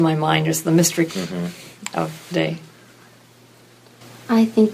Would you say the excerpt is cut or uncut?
cut